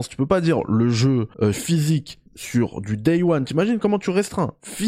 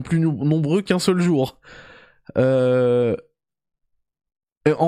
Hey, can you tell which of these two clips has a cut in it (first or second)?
first